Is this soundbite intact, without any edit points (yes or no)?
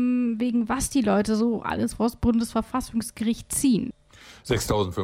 yes